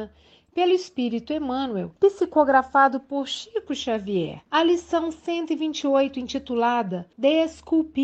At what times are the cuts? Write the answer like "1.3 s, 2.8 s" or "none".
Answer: 2.0 s, 4.5 s, 7.1 s